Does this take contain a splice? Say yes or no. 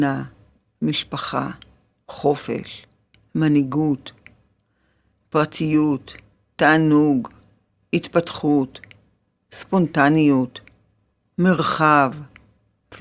no